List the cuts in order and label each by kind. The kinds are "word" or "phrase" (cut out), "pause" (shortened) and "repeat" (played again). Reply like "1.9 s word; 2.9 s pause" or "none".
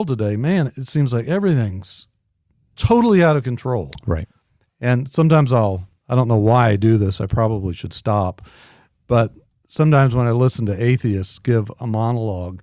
none